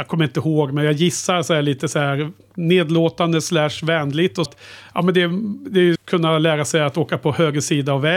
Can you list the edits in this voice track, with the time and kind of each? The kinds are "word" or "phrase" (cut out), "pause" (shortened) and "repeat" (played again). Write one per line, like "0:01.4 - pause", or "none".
0:04.4 - word
0:05.9 - phrase